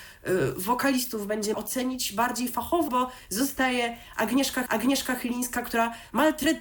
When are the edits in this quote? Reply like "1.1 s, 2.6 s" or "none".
1.5 s, 2.9 s, 4.7 s